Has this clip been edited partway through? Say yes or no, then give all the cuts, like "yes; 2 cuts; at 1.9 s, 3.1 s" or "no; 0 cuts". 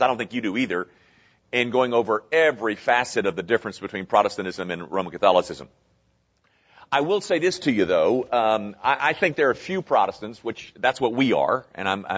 no; 0 cuts